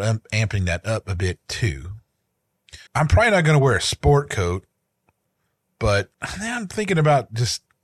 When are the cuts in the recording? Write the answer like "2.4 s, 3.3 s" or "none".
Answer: 2.9 s, 6.1 s